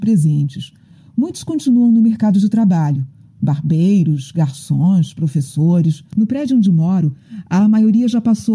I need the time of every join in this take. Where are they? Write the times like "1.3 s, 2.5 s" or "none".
6.1 s